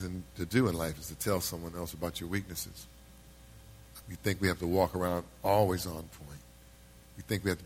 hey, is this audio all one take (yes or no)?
no